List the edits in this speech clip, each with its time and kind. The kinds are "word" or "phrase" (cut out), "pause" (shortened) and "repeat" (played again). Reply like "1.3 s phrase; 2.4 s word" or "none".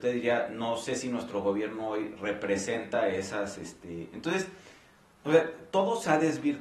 none